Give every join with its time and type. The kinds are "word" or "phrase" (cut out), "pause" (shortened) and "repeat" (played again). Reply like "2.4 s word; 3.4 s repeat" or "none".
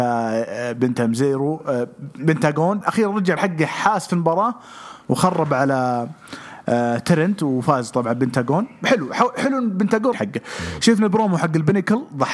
2.8 s word; 3.4 s phrase; 10.1 s phrase